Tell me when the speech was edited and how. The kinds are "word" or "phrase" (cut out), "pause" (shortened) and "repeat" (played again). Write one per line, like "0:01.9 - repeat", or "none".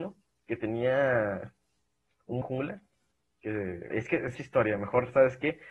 0:02.4 - word
0:03.9 - word
0:04.3 - word

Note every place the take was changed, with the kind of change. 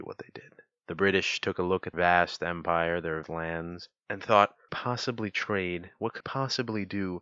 0:01.9 - word
0:03.2 - word
0:04.7 - phrase
0:06.2 - word

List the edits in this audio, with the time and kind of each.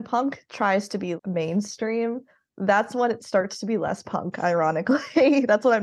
0:01.2 - word

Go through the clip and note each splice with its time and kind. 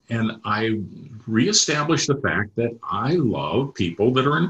none

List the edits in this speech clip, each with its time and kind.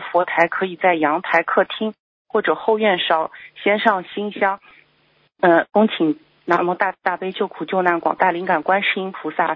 none

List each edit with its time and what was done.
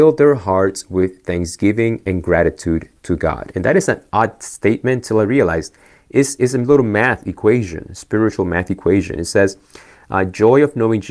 none

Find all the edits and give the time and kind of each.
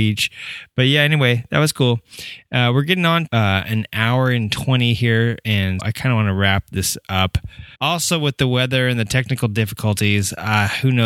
0:03.3 - word
0:05.8 - word
0:07.7 - pause

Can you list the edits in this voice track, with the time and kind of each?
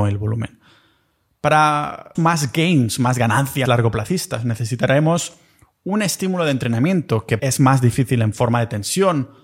0:02.1 - word
0:03.6 - word
0:07.4 - word

